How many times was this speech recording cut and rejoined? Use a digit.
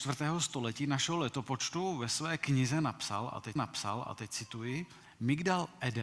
1